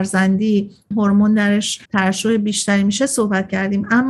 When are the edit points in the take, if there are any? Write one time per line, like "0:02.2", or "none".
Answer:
0:00.9
0:01.9

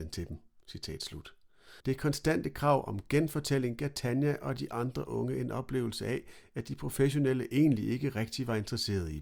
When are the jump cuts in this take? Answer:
0:01.8

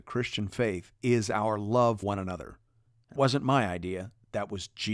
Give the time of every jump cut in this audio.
0:02.0
0:03.1

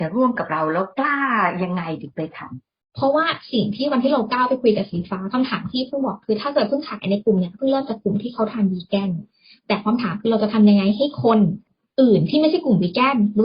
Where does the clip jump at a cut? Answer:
0:11.7

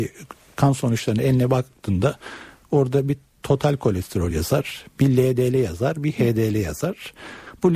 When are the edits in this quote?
none

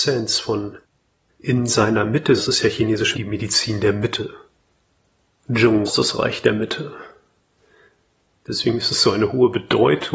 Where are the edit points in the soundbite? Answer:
0:02.4
0:03.1
0:05.9
0:07.6

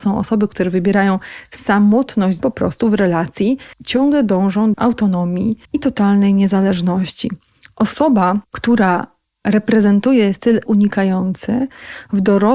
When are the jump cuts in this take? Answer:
0:02.4
0:03.7
0:04.7
0:05.6
0:08.4
0:10.7

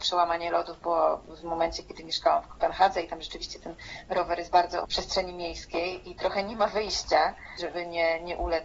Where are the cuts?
0:04.8

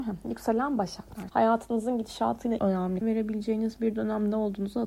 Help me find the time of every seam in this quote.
0:01.3
0:02.6
0:03.0

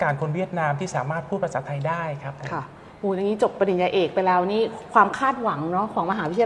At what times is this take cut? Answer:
none

